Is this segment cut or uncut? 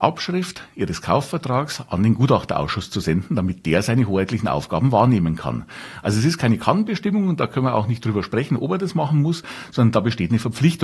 uncut